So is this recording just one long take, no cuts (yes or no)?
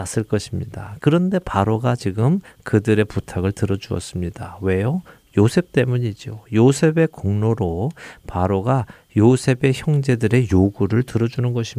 yes